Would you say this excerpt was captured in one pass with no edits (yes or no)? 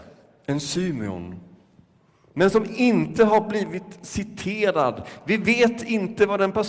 yes